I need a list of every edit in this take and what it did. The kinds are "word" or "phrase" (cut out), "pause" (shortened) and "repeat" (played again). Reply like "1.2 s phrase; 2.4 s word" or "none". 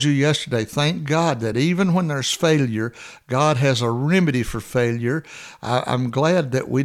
none

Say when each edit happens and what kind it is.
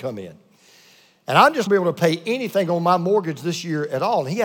1.7 s phrase

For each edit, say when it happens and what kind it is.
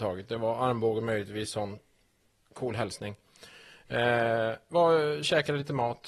none

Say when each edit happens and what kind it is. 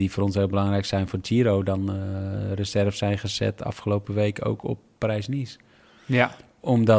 none

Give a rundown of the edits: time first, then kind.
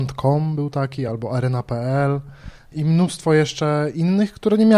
none

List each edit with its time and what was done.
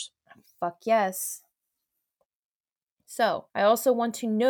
3.5 s pause

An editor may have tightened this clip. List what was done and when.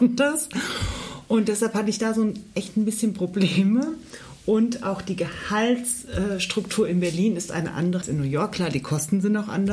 8.0 s word

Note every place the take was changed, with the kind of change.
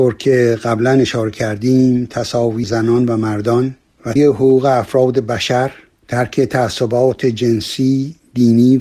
2.6 s word; 4.2 s word

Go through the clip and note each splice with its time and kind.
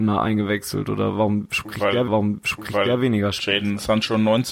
2.1 s repeat

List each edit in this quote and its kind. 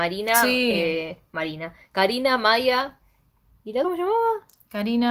3.8 s word

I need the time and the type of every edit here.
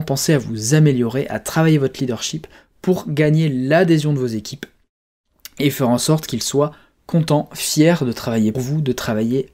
8.5 s word

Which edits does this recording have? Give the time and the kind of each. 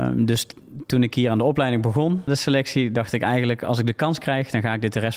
2.3 s word

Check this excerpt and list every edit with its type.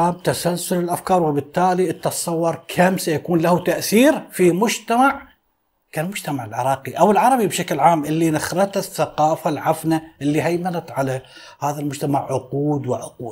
none

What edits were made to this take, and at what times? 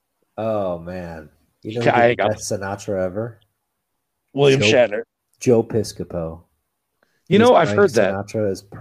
none

